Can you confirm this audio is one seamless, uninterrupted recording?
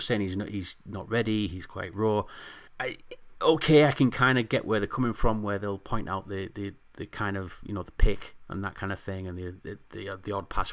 no; 1 cut; at 2.7 s

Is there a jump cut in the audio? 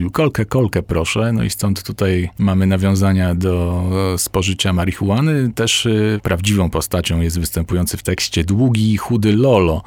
no; 0 cuts

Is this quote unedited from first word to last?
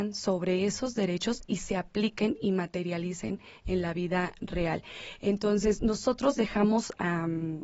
yes; 0 cuts

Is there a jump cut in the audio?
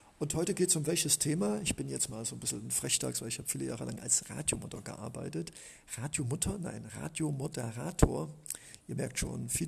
no; 0 cuts

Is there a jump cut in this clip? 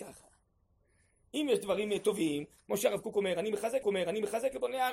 yes; 1 cut; at 3.8 s

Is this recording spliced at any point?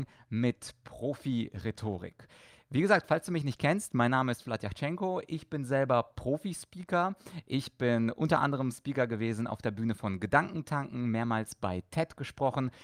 no; 0 cuts

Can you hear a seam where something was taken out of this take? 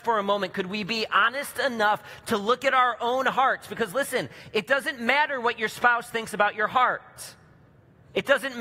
no; 0 cuts

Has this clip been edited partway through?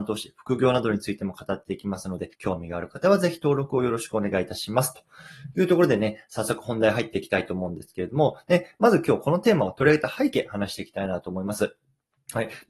yes; 1 cut; at 2.3 s

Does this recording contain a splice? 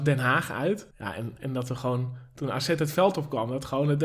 yes; 1 cut; at 0.9 s

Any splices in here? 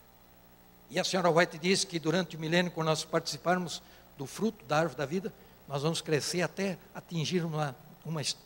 no; 0 cuts

